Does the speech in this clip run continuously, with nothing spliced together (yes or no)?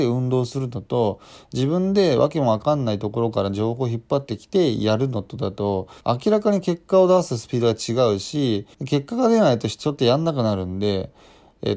no